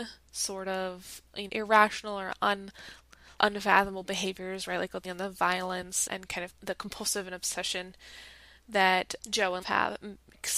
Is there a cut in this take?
yes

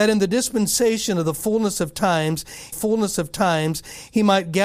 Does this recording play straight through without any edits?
no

